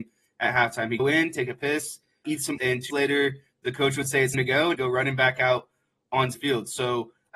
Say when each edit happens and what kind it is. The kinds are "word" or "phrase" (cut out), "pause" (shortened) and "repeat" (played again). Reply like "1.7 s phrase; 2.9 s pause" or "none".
1.0 s word; 2.2 s word; 2.6 s word; 2.9 s word; 4.3 s word; 4.7 s word; 6.3 s word